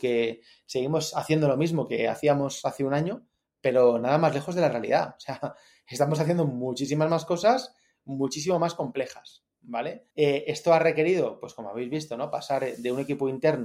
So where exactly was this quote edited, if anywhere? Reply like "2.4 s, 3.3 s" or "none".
10.1 s

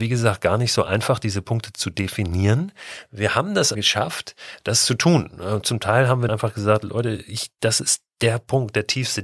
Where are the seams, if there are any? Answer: 3.7 s, 6.3 s

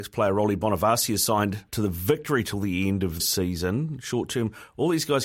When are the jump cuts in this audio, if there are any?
1.7 s, 3.2 s

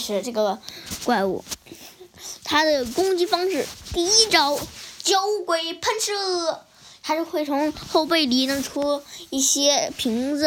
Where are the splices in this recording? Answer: none

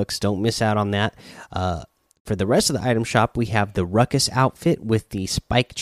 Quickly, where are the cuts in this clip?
none

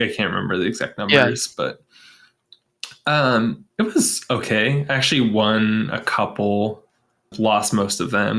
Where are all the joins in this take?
3.7 s, 7.3 s

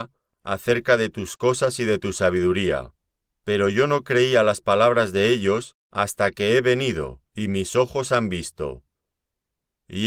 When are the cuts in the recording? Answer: 3.2 s, 5.8 s, 7.3 s

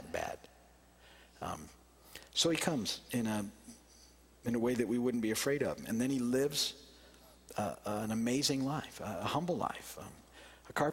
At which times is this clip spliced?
none

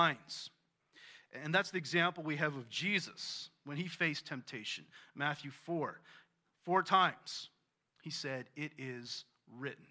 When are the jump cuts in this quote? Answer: none

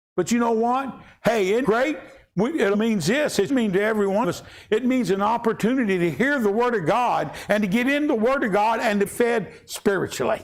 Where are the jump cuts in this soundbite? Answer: 1.6 s, 2.7 s, 3.5 s, 4.2 s, 9.1 s

